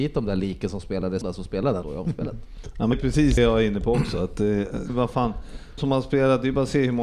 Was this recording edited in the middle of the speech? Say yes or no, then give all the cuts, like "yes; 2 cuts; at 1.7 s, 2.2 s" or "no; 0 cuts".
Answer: yes; 6 cuts; at 1.2 s, 1.8 s, 2.9 s, 3.4 s, 4.9 s, 5.8 s